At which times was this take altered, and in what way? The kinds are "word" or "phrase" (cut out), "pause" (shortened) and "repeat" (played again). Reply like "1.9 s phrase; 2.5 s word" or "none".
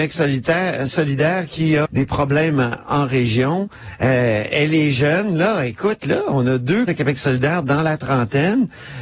1.8 s word; 6.9 s word